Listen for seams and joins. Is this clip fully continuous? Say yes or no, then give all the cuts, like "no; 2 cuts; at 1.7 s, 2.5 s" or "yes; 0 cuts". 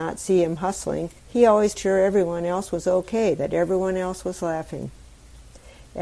no; 2 cuts; at 1.2 s, 1.8 s